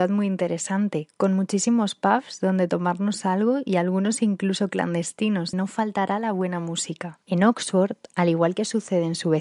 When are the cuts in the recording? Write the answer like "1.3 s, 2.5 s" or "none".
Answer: 5.5 s, 7.2 s